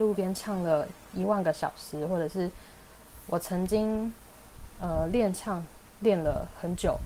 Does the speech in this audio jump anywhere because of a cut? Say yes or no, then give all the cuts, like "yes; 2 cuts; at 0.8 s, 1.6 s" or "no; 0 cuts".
no; 0 cuts